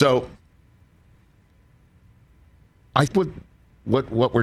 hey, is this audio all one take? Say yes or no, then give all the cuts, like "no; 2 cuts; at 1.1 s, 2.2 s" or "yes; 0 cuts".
no; 1 cut; at 3.1 s